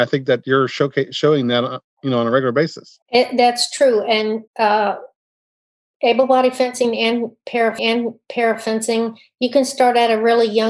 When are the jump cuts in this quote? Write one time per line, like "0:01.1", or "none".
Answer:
0:03.0
0:04.5
0:07.8